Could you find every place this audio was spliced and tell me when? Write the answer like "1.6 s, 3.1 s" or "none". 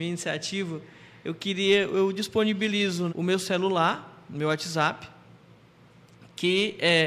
3.1 s